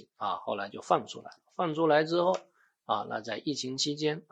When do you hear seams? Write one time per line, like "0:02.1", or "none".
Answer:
none